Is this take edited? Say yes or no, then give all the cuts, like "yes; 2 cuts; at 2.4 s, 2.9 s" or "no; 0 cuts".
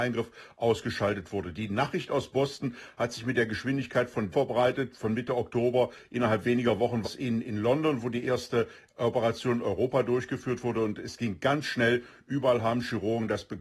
yes; 2 cuts; at 4.3 s, 7.0 s